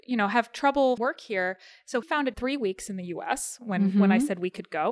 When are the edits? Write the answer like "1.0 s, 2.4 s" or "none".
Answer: 1.0 s, 2.0 s, 2.3 s